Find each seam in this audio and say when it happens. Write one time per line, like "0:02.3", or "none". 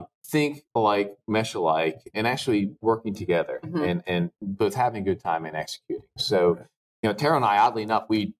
0:02.1
0:02.8